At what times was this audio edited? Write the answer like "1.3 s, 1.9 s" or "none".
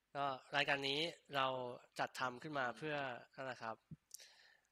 1.9 s, 3.2 s